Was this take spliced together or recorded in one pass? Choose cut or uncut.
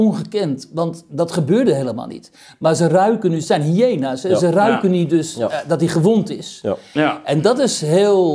uncut